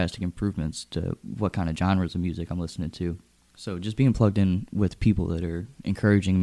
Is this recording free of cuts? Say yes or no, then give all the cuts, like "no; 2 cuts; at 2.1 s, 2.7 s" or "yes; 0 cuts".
yes; 0 cuts